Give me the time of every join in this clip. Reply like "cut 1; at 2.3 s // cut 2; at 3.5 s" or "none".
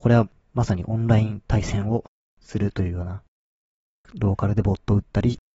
none